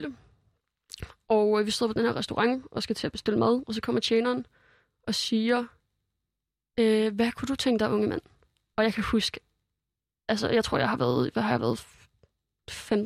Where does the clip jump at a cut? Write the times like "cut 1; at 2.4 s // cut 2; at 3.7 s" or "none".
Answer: none